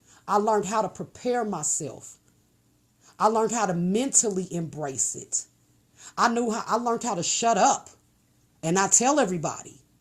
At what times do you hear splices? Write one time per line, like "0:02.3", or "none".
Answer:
none

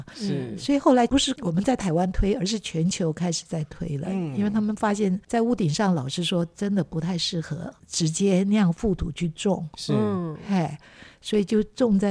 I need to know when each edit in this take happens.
0:09.7

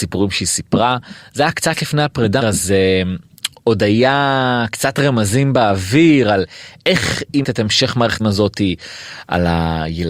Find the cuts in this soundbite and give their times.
0:02.4
0:07.4
0:08.2

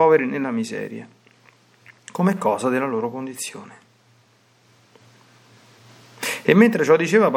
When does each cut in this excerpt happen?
0:02.0

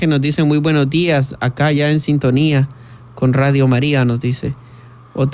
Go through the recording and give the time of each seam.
none

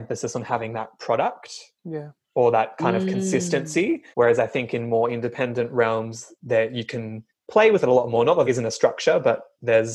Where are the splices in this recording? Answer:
0:04.1
0:07.3
0:08.5

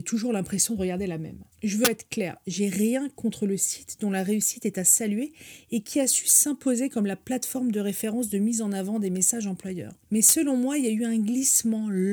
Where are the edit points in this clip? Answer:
0:01.5
0:10.0

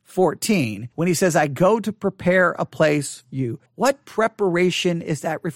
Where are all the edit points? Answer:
0:00.9
0:03.2
0:03.7

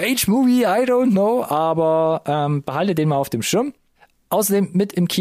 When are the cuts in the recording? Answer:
none

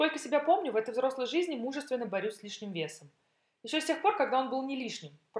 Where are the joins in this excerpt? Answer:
none

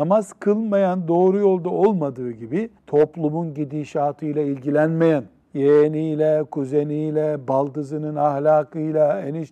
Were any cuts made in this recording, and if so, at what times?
0:02.8
0:05.4

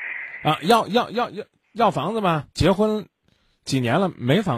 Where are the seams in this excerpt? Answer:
0:02.5

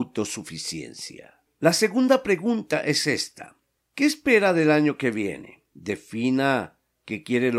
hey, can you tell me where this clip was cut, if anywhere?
none

